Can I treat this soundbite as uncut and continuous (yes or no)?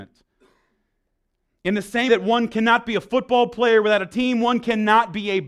no